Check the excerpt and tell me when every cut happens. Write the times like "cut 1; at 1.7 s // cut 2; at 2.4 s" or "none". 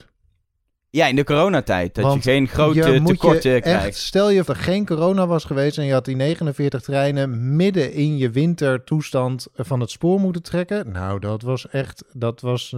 cut 1; at 4.5 s